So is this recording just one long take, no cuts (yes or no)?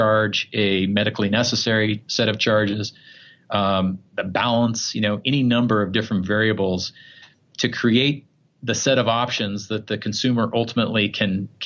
yes